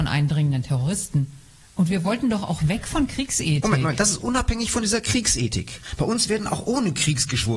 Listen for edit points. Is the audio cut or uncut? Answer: uncut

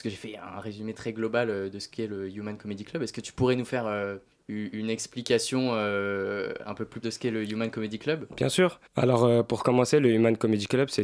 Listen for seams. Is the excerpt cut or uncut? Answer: cut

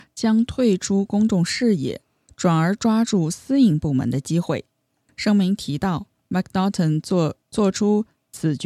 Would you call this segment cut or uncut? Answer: cut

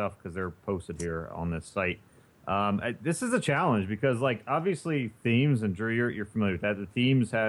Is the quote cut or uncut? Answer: uncut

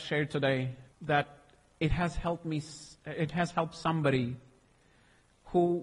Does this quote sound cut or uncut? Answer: cut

